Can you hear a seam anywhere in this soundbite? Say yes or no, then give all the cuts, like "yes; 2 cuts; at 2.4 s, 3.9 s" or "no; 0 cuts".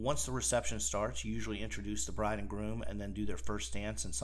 no; 0 cuts